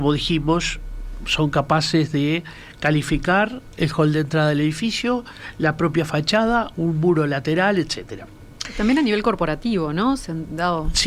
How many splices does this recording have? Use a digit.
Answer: 0